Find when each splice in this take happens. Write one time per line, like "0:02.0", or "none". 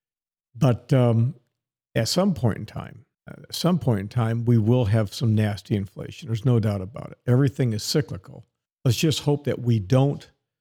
0:03.1
0:08.7